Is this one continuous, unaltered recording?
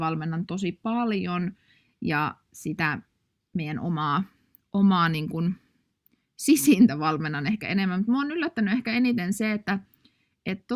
yes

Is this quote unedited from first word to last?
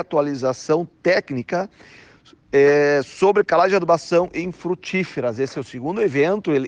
yes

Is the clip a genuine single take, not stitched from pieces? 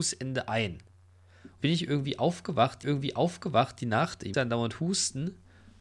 no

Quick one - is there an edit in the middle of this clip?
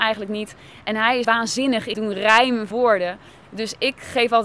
yes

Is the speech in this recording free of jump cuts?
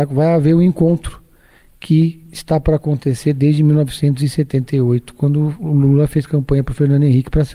yes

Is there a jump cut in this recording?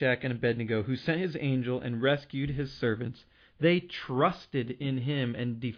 no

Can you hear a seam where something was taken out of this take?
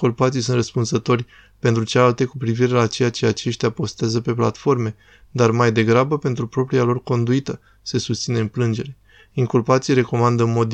yes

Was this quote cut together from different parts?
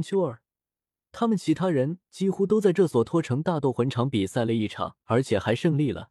yes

